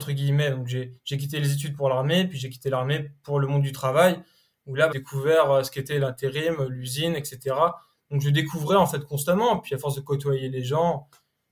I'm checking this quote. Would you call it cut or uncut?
cut